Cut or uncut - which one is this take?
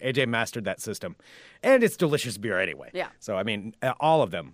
cut